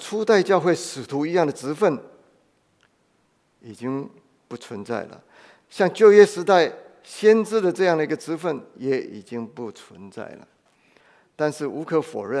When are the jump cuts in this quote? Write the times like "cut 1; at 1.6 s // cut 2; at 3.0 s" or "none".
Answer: none

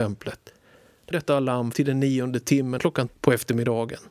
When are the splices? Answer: cut 1; at 1.1 s // cut 2; at 1.7 s // cut 3; at 2.8 s // cut 4; at 3.1 s

